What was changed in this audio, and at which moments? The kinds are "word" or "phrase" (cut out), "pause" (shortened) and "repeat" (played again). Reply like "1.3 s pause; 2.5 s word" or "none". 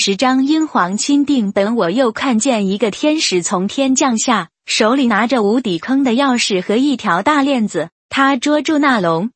8.0 s pause

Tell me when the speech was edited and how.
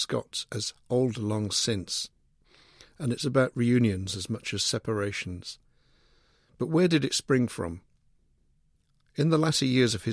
none

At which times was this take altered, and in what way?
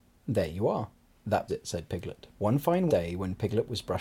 1.5 s word; 2.3 s pause; 2.9 s word

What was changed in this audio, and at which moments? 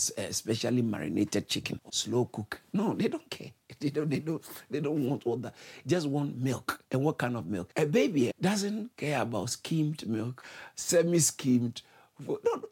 1.9 s phrase; 6.8 s pause; 8.3 s word

